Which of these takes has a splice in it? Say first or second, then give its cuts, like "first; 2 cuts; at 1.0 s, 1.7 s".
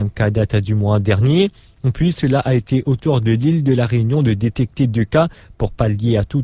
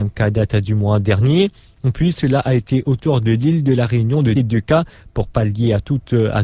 second; 1 cut; at 4.4 s